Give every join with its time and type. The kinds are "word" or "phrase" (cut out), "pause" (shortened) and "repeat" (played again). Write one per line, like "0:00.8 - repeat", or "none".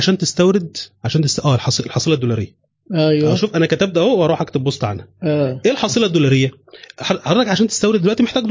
none